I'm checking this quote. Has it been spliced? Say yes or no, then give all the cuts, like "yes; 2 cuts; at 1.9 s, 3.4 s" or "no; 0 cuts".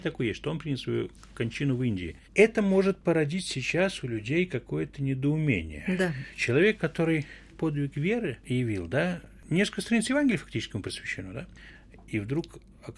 yes; 3 cuts; at 2.2 s, 7.5 s, 8.4 s